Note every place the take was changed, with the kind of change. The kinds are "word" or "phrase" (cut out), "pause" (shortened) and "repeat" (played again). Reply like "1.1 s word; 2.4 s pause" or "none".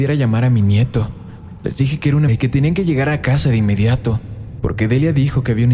2.3 s word